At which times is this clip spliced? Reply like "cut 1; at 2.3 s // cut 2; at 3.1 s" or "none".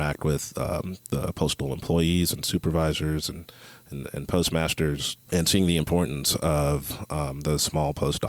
cut 1; at 5.2 s

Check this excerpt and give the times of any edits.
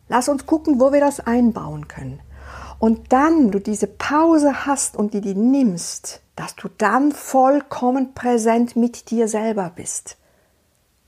cut 1; at 3.5 s // cut 2; at 6.3 s

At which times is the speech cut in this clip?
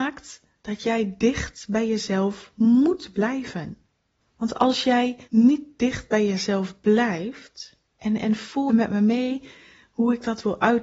cut 1; at 5.2 s // cut 2; at 7.9 s // cut 3; at 8.7 s

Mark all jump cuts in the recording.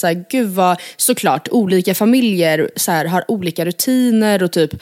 none

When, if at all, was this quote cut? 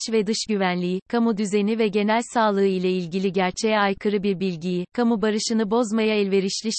none

